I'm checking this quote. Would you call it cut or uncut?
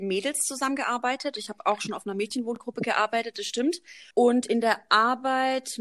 cut